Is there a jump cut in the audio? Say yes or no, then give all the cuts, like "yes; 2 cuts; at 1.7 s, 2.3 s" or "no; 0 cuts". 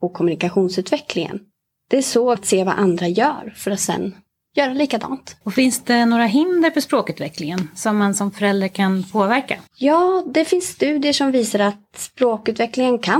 yes; 3 cuts; at 2.4 s, 5.4 s, 9.7 s